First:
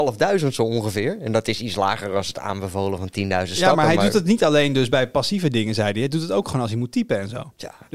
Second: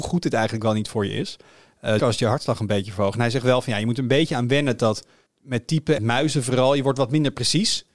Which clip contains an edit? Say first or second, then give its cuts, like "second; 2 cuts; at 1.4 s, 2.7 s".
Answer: second; 3 cuts; at 2.0 s, 5.3 s, 6.0 s